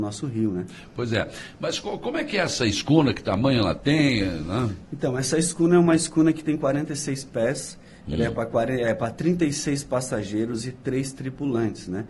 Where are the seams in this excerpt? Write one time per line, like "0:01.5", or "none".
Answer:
none